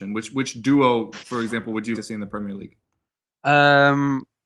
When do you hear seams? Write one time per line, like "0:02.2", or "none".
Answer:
0:01.9